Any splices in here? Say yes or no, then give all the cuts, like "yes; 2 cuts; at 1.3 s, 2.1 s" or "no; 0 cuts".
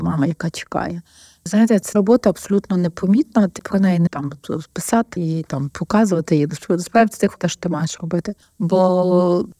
yes; 5 cuts; at 1.9 s, 3.6 s, 4.1 s, 5.2 s, 7.4 s